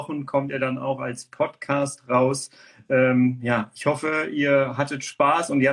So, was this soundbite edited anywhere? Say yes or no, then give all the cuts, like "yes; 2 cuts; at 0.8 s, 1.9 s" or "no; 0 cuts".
no; 0 cuts